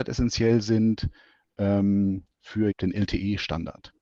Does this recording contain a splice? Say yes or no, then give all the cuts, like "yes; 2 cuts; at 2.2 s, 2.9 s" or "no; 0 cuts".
yes; 1 cut; at 2.7 s